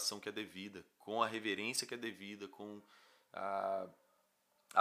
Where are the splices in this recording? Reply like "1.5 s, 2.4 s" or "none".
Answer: none